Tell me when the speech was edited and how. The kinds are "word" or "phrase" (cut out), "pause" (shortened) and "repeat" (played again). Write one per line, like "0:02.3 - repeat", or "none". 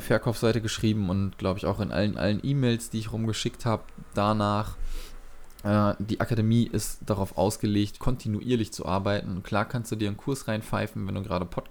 0:02.1 - repeat
0:08.0 - word